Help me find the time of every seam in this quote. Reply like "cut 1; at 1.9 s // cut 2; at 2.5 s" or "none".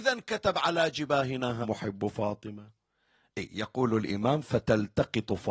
cut 1; at 1.6 s